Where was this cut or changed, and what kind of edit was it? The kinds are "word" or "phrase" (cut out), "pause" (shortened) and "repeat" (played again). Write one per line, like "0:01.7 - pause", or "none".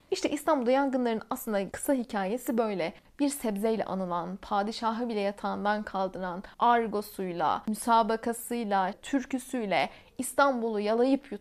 0:03.0 - pause
0:06.5 - pause
0:08.9 - word